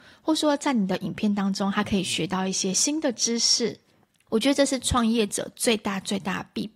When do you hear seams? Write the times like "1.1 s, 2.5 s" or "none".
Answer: none

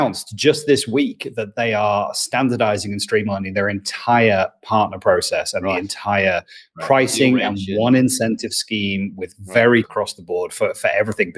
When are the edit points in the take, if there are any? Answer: 9.8 s

